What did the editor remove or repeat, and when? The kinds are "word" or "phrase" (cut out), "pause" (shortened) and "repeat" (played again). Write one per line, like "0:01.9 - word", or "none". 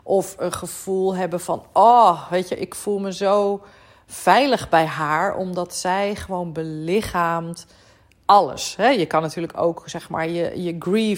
none